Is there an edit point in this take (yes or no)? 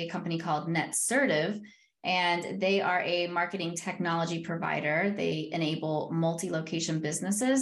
no